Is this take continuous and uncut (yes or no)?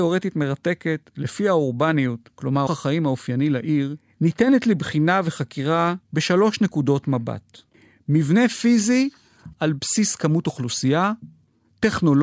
no